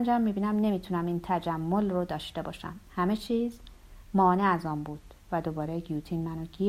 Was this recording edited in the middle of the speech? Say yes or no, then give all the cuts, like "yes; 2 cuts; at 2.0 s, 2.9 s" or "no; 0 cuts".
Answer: yes; 1 cut; at 2.9 s